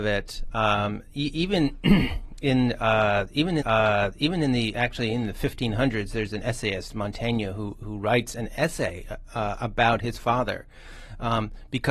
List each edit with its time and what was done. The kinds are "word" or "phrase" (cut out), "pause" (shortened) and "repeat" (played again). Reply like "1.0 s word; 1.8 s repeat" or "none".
3.6 s repeat